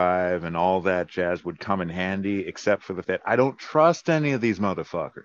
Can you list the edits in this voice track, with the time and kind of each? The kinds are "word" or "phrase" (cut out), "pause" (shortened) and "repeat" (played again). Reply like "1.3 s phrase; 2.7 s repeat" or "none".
3.0 s word